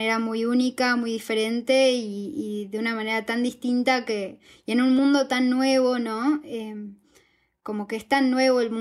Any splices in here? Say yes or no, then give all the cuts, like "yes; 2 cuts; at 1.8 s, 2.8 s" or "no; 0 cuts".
no; 0 cuts